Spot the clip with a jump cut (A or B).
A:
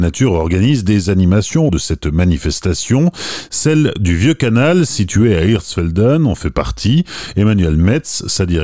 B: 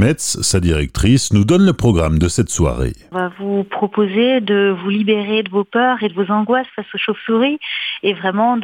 A